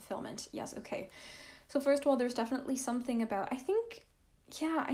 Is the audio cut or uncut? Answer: uncut